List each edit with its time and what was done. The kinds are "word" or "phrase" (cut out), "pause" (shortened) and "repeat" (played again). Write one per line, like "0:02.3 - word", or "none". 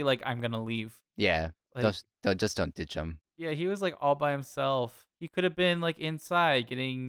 0:01.6 - pause
0:03.3 - pause
0:05.1 - pause